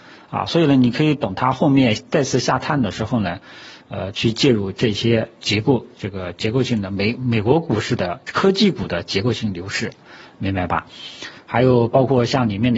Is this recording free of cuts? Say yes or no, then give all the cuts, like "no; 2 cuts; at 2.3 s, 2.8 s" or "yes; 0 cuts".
yes; 0 cuts